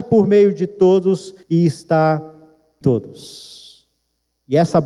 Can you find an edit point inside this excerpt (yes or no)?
yes